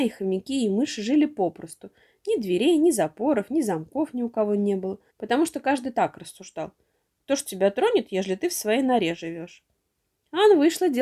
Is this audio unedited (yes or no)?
no